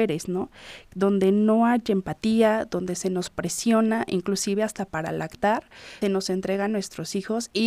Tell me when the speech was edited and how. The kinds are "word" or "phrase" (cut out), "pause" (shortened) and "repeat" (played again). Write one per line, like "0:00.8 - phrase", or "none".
0:06.0 - word